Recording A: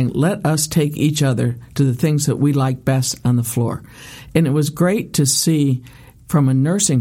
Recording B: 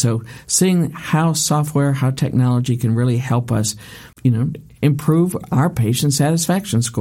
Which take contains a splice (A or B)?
B